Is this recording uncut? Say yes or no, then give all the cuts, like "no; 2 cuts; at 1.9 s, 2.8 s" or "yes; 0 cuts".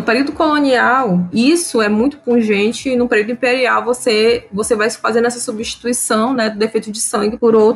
yes; 0 cuts